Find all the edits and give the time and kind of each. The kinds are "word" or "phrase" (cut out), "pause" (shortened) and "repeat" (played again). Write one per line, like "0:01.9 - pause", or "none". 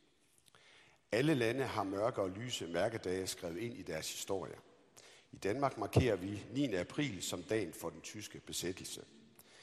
none